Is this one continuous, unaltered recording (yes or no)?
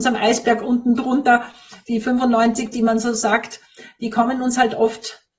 no